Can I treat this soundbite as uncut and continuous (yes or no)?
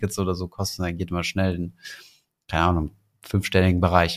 yes